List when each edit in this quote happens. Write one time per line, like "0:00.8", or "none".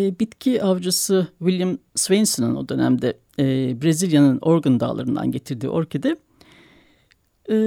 none